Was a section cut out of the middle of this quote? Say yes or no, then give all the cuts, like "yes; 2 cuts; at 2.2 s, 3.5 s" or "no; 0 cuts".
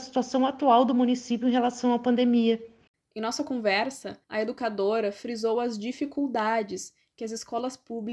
yes; 1 cut; at 4.2 s